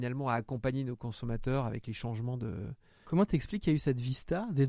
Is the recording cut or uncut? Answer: uncut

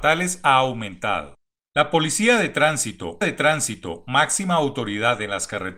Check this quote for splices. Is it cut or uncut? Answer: cut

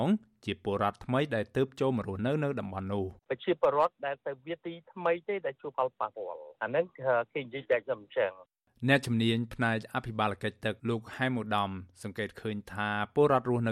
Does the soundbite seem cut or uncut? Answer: cut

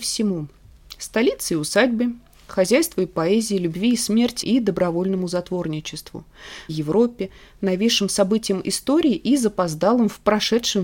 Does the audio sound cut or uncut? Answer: cut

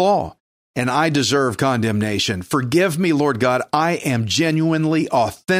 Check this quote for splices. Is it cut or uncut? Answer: uncut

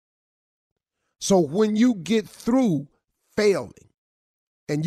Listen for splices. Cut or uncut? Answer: uncut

